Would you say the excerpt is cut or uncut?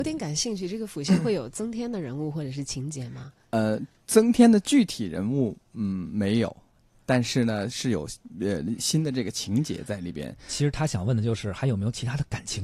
uncut